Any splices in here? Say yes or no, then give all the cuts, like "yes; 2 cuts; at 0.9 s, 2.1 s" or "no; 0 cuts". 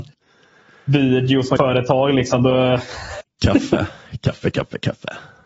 yes; 2 cuts; at 1.6 s, 4.5 s